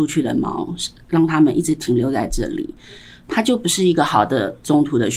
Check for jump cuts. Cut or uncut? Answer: uncut